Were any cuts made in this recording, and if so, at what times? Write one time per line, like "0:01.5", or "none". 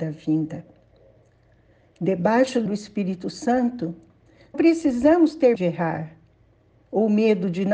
0:02.7
0:04.5
0:05.6